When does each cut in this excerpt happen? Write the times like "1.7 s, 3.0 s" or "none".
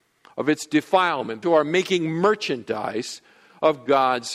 1.4 s